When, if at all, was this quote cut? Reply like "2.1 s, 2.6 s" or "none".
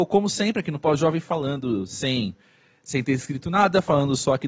none